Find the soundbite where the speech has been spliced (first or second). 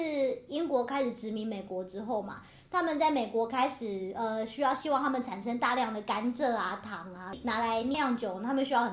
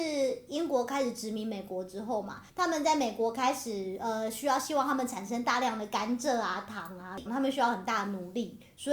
second